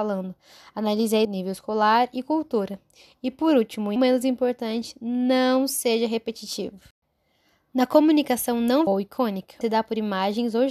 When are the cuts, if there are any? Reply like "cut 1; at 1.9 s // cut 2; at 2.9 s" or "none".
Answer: cut 1; at 1.2 s // cut 2; at 4.0 s // cut 3; at 8.9 s // cut 4; at 9.6 s